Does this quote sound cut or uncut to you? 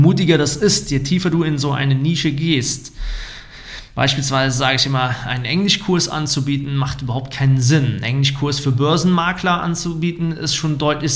uncut